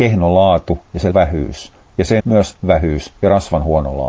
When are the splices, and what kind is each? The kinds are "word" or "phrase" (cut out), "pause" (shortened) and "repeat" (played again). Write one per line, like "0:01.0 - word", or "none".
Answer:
0:01.1 - word
0:02.2 - word
0:02.6 - word